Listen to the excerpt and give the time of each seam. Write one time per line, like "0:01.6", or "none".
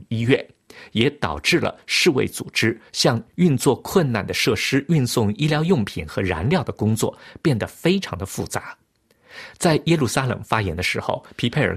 0:02.9